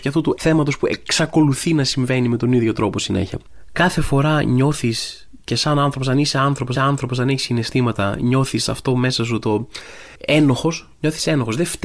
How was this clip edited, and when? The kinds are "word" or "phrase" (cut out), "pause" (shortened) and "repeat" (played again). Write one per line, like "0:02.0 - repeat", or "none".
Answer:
0:06.7 - repeat